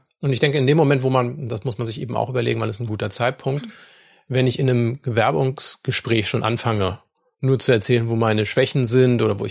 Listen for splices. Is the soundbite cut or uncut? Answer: uncut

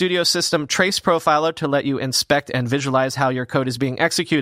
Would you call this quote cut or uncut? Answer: uncut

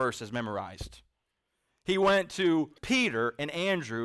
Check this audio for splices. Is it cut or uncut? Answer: cut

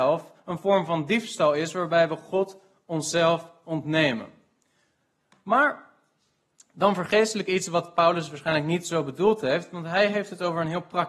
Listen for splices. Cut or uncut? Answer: uncut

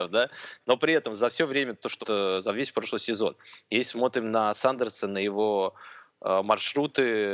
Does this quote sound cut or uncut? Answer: cut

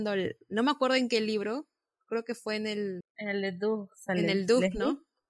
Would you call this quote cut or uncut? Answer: cut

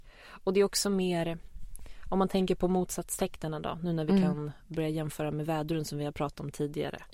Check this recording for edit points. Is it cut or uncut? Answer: uncut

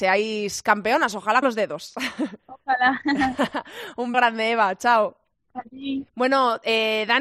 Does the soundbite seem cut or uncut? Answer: cut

